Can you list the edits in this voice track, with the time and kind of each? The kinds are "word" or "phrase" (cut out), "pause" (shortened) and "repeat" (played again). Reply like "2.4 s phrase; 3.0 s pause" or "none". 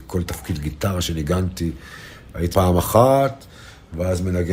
2.5 s word